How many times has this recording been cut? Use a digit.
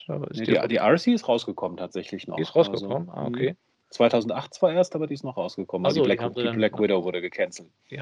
0